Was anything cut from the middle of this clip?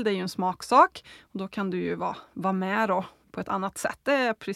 no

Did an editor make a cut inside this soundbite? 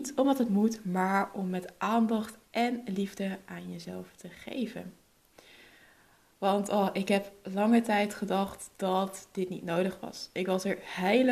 no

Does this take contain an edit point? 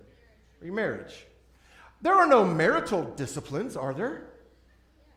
no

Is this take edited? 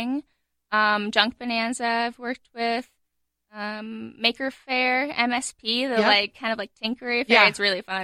no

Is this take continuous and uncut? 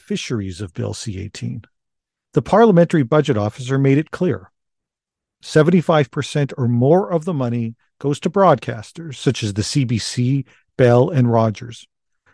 yes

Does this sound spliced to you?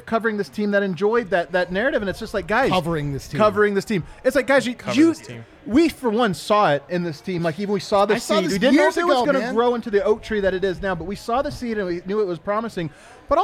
no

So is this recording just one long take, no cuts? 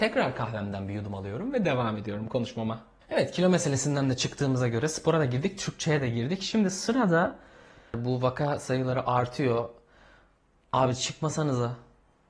yes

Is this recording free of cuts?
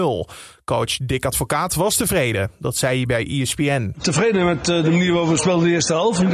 yes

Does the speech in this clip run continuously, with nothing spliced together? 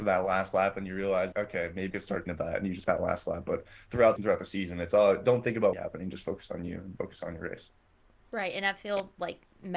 no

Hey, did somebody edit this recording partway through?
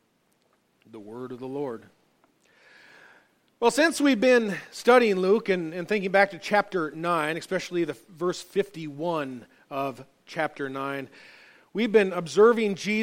no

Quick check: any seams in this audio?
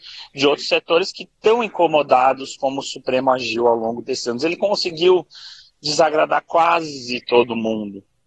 no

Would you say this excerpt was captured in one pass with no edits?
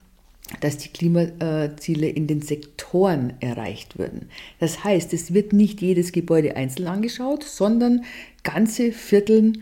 yes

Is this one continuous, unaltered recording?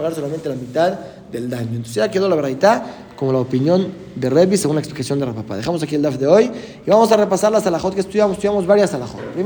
yes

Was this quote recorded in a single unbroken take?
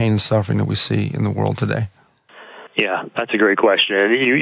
no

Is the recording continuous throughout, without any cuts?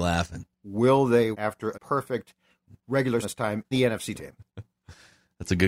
no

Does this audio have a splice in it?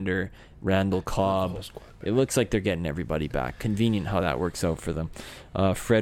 no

